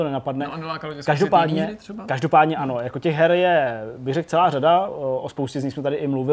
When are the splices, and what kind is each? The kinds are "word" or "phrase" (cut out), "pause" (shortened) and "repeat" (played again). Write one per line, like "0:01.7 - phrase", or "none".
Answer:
none